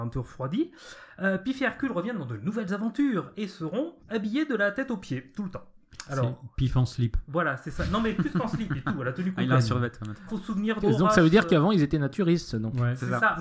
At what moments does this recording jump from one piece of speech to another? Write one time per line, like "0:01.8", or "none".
0:04.0
0:10.3
0:10.8